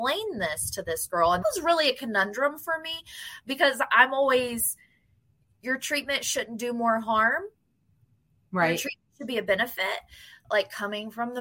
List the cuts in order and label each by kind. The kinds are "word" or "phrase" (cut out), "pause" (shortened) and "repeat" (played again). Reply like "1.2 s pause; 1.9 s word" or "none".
1.4 s word